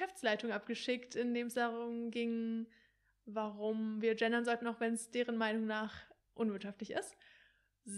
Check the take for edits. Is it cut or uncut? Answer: uncut